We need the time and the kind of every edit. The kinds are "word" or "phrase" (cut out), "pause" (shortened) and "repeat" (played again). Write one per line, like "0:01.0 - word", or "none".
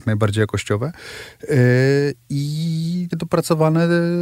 0:03.1 - word